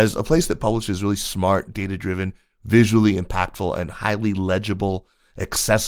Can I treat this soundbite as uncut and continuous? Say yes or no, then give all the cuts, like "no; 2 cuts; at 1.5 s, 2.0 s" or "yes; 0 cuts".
yes; 0 cuts